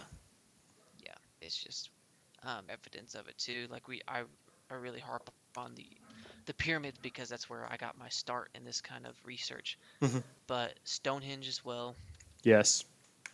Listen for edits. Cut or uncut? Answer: cut